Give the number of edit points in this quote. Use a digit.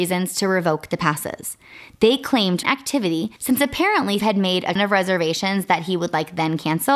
4